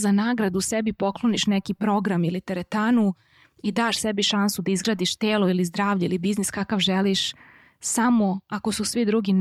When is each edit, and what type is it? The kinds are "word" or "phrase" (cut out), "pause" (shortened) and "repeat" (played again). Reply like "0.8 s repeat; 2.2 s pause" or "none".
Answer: none